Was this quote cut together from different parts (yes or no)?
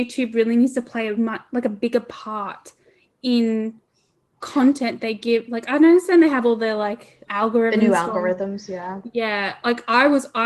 yes